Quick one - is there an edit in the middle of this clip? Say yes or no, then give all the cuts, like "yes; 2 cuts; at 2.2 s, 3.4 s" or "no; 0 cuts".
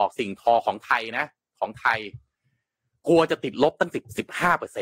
no; 0 cuts